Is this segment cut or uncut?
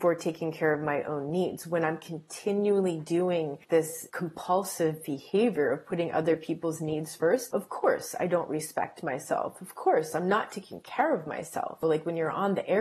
uncut